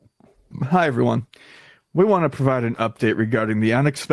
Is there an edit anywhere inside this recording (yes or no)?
no